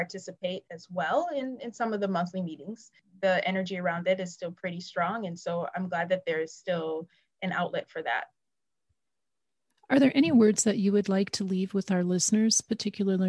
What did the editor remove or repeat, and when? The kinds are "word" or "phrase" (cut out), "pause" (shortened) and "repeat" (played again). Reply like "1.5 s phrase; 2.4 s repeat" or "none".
none